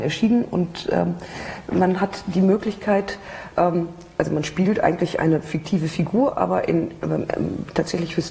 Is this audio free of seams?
yes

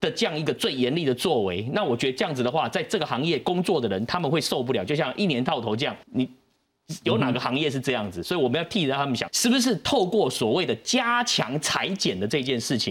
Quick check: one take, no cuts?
no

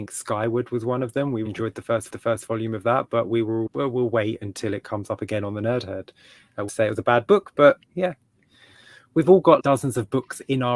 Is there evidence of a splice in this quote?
yes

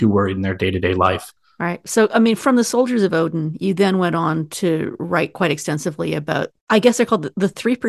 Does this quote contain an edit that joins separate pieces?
no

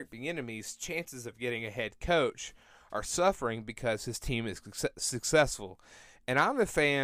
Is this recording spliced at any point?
no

